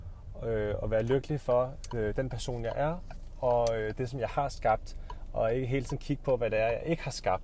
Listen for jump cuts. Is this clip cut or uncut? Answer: uncut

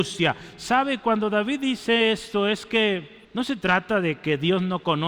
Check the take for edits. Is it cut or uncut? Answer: cut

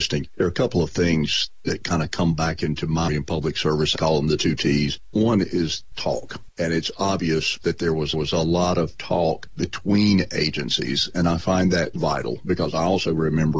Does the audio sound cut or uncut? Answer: cut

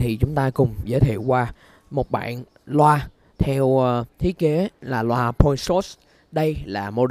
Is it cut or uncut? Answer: cut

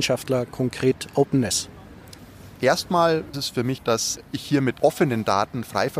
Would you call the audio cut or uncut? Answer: cut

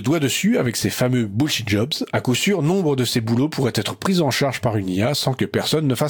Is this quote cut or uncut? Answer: uncut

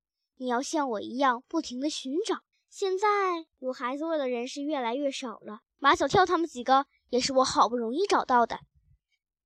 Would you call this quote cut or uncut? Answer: cut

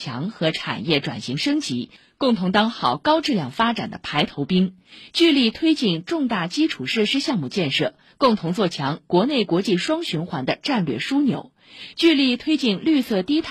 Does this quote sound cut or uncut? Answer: uncut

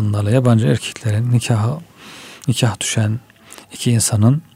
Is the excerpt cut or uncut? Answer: uncut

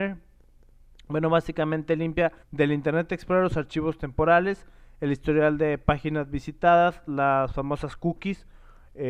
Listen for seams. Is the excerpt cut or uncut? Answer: cut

